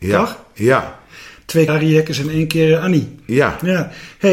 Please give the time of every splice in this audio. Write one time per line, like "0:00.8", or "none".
0:01.7